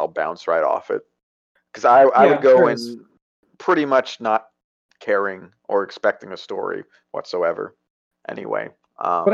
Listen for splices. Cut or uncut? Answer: uncut